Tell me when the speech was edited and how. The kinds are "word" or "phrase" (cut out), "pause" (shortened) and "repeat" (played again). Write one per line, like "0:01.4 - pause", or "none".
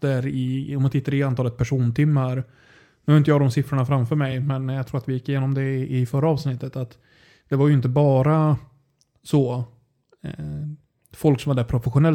none